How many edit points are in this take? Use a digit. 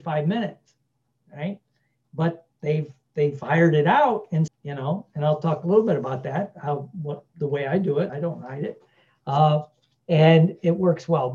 2